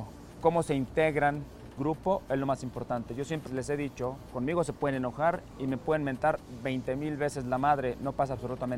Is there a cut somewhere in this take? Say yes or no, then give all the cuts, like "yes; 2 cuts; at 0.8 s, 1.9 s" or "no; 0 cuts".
yes; 2 cuts; at 1.8 s, 3.5 s